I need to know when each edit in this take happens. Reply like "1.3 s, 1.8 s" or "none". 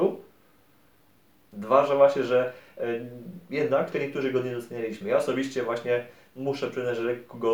3.9 s